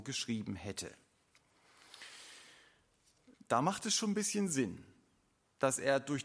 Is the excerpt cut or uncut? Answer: uncut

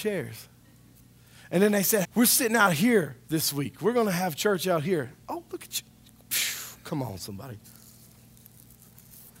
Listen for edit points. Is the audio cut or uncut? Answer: cut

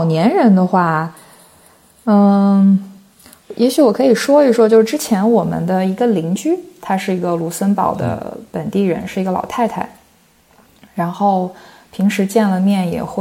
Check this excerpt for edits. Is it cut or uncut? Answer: uncut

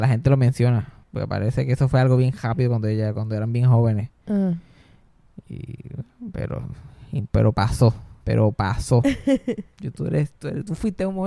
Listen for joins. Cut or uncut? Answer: cut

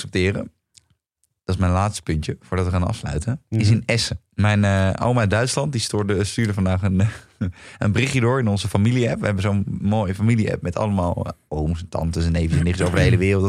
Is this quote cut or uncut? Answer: cut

